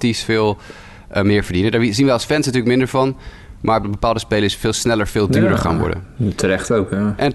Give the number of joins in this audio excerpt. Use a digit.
1